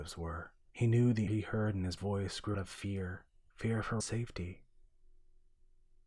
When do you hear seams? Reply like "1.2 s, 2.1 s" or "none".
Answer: 1.3 s, 2.0 s, 2.5 s, 4.0 s